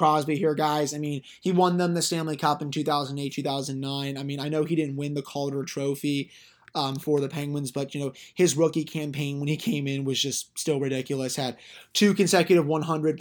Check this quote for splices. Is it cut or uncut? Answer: uncut